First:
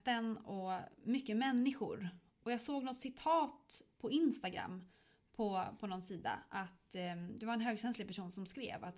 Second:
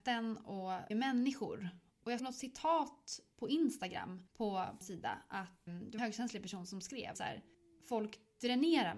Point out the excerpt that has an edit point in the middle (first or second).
second